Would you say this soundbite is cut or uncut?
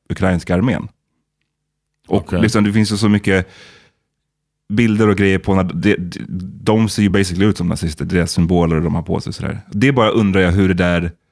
uncut